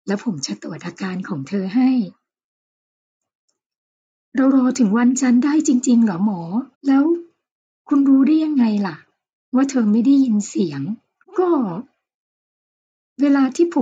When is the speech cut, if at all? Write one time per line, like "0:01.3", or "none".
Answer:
0:06.7
0:11.2